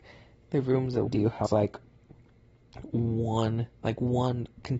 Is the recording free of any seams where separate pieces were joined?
no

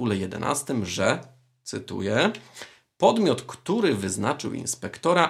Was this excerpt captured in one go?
yes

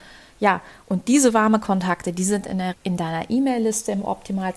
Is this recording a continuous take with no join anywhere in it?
no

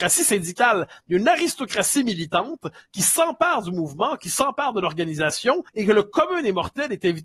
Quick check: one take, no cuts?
no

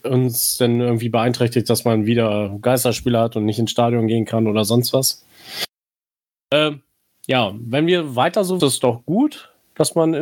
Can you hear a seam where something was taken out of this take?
yes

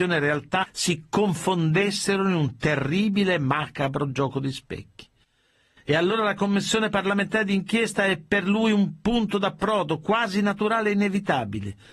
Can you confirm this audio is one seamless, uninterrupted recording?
yes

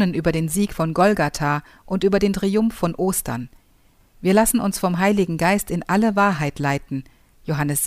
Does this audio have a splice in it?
no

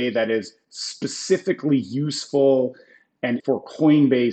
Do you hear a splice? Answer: yes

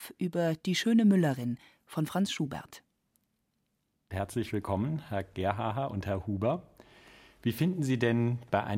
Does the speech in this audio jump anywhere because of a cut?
no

